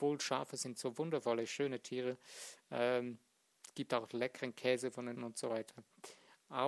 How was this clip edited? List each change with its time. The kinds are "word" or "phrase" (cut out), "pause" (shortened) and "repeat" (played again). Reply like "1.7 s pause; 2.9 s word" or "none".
5.2 s word